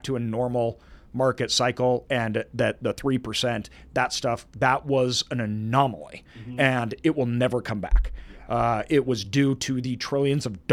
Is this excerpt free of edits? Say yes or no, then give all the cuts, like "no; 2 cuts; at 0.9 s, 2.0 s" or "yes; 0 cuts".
yes; 0 cuts